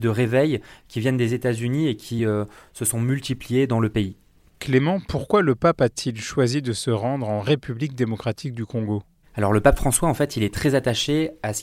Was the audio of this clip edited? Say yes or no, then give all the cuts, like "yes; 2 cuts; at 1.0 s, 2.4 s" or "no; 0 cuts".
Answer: no; 0 cuts